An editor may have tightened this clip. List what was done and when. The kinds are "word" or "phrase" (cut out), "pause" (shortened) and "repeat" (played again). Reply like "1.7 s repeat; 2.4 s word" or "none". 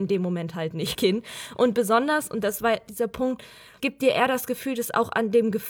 0.9 s word; 3.8 s word